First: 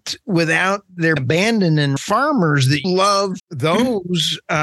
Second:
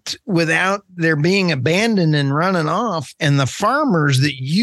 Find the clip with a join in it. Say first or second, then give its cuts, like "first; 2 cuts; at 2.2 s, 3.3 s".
first; 4 cuts; at 1.2 s, 2.0 s, 2.8 s, 3.4 s